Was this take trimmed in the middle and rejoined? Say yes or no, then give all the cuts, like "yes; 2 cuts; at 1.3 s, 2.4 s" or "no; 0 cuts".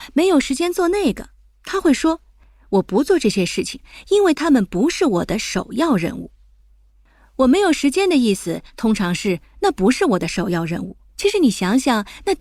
yes; 1 cut; at 11.1 s